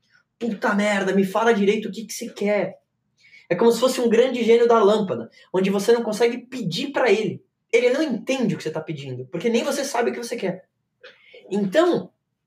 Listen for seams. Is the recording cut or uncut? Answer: uncut